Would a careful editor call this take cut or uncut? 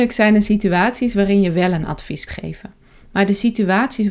cut